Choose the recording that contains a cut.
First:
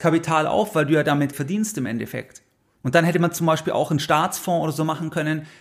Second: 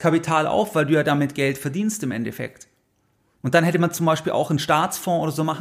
first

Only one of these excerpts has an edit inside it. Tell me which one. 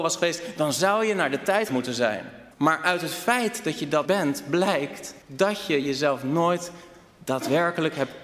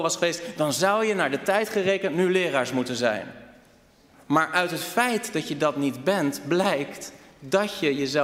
first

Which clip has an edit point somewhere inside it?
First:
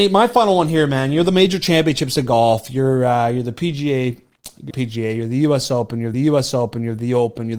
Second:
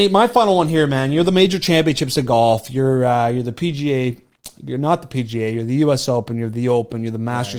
first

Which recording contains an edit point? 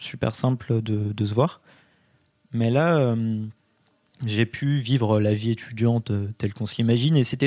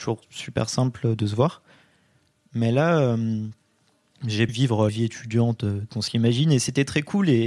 second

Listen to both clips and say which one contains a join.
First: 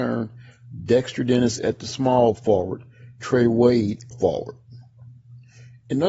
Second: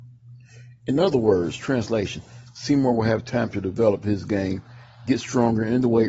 first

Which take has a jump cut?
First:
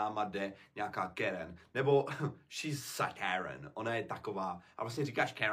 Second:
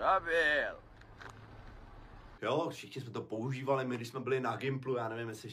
first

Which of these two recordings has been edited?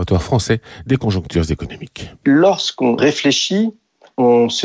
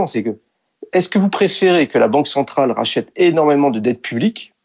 first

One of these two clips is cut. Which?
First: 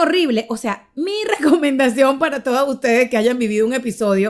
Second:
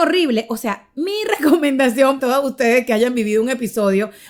second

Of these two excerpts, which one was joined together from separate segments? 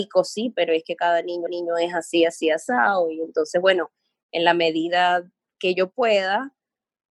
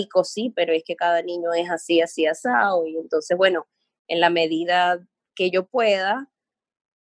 first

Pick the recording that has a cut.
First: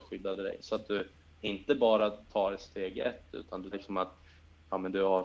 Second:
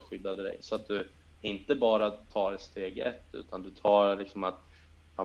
first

